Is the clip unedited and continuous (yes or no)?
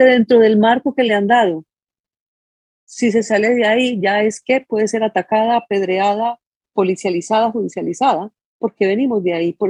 yes